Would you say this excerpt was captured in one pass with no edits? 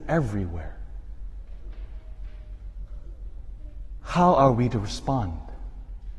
yes; 0 cuts

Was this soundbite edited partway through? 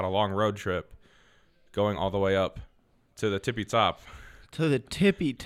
no; 0 cuts

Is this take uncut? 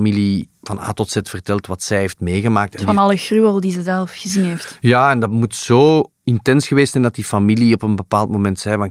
yes; 0 cuts

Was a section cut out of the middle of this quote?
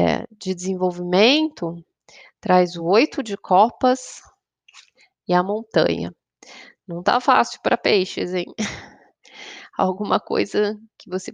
no; 0 cuts

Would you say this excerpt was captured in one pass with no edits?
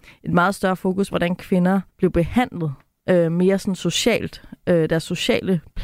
no; 2 cuts; at 1.1 s, 1.9 s

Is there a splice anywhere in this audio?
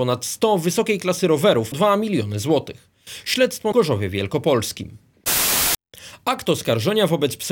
yes; 2 cuts; at 1.7 s, 3.7 s

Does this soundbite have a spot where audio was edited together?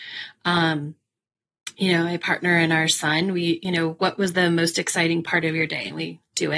no; 0 cuts

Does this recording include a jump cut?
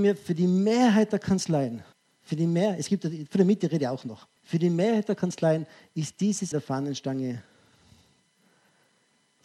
yes; 3 cuts; at 1.9 s, 4.4 s, 6.5 s

